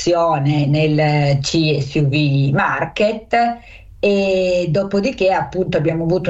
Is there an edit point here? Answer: no; 0 cuts

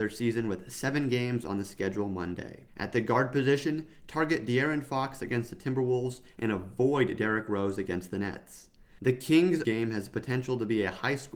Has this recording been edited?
yes; 2 cuts; at 2.7 s, 9.6 s

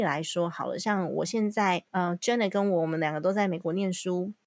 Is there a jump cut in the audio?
yes; 1 cut; at 1.9 s

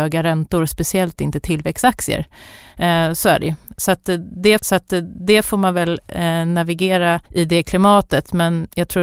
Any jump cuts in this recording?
yes; 2 cuts; at 4.6 s, 7.3 s

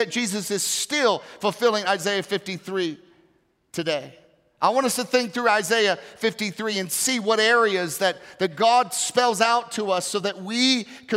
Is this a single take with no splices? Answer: yes; 0 cuts

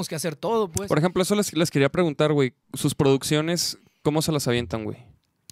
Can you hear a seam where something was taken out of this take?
no; 0 cuts

